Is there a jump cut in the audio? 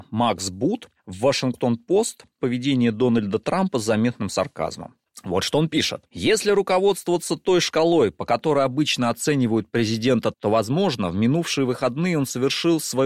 yes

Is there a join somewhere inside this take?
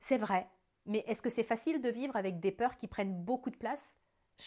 no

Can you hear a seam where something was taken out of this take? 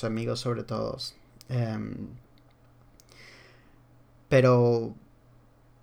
no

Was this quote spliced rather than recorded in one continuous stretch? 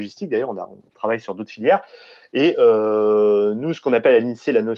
no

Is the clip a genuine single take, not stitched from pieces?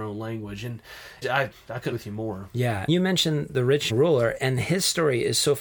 no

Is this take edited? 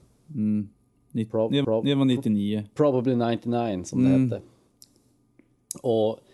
yes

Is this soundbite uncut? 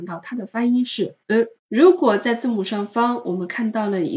no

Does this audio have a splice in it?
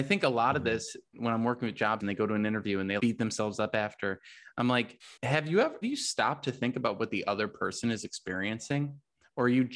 yes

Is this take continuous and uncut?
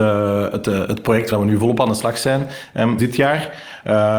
no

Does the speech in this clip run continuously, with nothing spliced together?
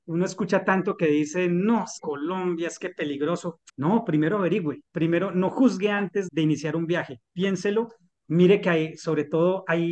no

